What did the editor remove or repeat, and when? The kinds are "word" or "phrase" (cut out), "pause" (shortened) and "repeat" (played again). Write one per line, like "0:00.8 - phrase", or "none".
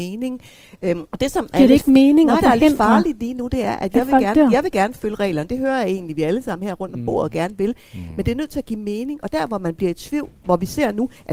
0:01.1 - pause
0:02.4 - phrase